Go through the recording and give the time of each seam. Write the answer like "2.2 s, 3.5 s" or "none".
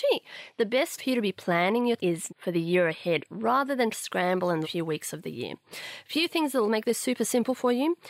1.0 s, 2.0 s, 2.3 s, 3.9 s, 4.6 s